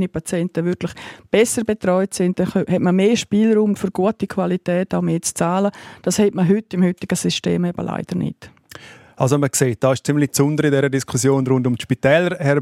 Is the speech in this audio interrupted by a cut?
no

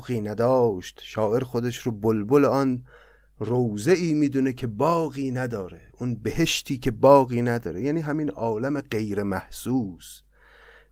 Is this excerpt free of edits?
yes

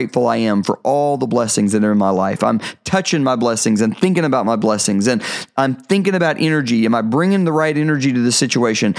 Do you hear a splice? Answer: no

